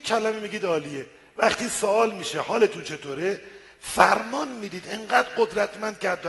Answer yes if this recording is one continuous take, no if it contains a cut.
yes